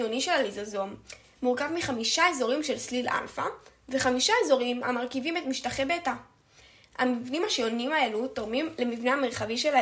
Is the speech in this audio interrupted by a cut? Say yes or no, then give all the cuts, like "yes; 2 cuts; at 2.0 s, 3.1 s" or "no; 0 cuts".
no; 0 cuts